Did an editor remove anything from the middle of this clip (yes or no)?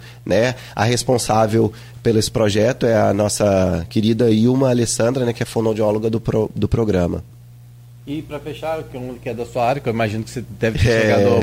no